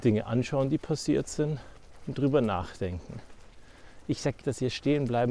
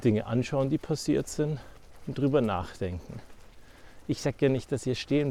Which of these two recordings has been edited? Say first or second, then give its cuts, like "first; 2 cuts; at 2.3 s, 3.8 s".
first; 1 cut; at 4.4 s